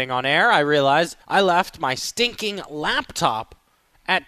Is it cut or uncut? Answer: cut